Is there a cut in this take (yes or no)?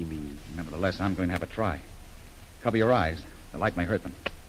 no